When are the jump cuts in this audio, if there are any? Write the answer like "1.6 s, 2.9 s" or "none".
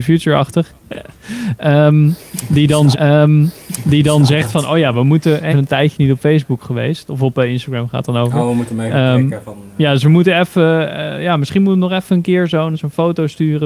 2.9 s, 5.5 s, 12.7 s

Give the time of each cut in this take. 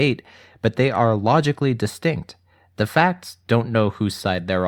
none

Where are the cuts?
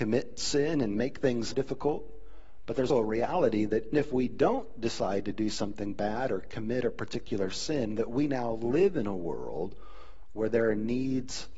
1.5 s, 2.9 s, 3.9 s

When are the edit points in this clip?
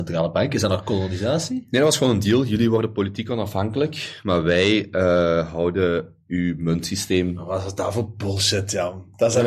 none

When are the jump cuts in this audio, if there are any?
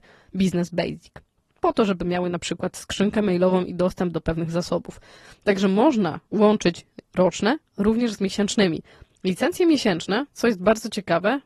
none

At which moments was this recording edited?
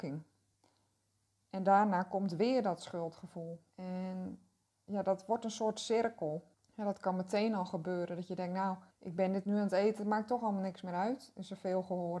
3.7 s, 6.5 s, 8.9 s

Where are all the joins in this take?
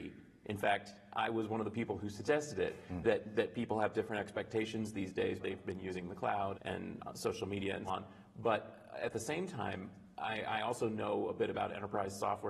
5.4 s, 6.5 s, 7.9 s

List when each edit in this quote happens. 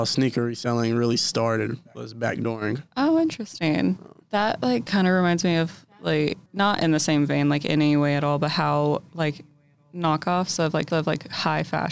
6.5 s, 10.9 s

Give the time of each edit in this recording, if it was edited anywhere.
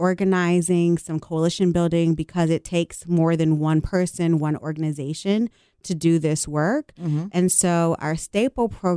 none

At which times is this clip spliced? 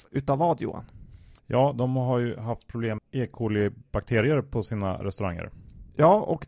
1.4 s, 3.0 s

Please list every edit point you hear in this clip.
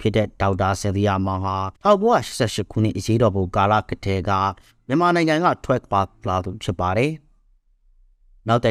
1.8 s

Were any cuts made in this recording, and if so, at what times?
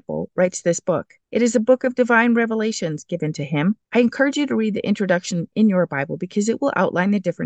1.2 s, 3.8 s

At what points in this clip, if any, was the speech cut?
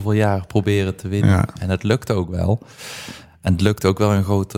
none

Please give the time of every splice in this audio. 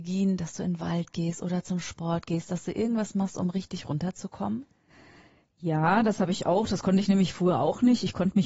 none

